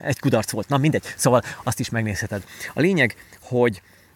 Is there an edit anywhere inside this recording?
no; 0 cuts

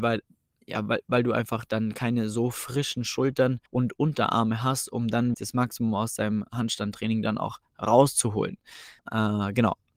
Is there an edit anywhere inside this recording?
yes; 3 cuts; at 3.7 s, 5.3 s, 9.0 s

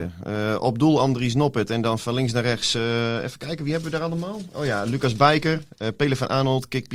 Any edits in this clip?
no; 0 cuts

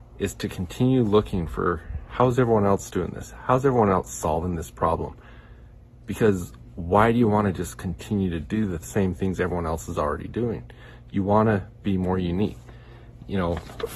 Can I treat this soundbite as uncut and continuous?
yes; 0 cuts

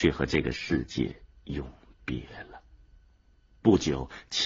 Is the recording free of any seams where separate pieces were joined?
yes; 0 cuts

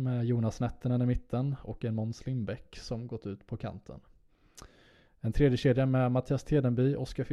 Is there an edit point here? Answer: no; 0 cuts

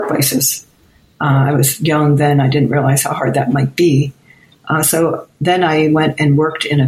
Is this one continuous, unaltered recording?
yes; 0 cuts

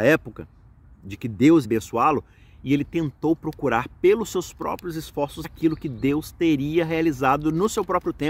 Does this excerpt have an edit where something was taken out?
yes; 2 cuts; at 1.6 s, 5.4 s

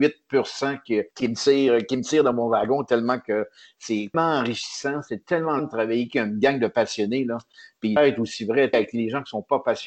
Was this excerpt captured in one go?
no; 5 cuts; at 1.1 s, 4.1 s, 5.6 s, 8.0 s, 8.7 s

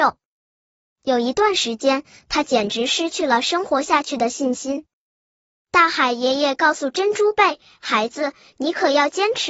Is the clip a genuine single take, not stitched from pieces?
yes; 0 cuts

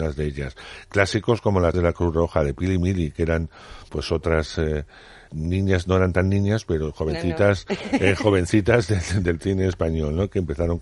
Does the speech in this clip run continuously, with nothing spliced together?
no; 3 cuts; at 1.7 s, 3.9 s, 5.3 s

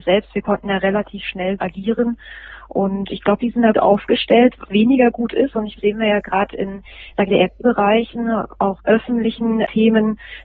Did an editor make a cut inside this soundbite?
yes; 8 cuts; at 1.6 s, 3.1 s, 3.7 s, 4.7 s, 5.8 s, 7.3 s, 7.6 s, 8.8 s

